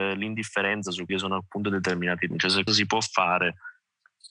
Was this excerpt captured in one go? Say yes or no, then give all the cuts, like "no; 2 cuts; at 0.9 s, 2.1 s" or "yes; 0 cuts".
no; 3 cuts; at 1.1 s, 2.3 s, 2.7 s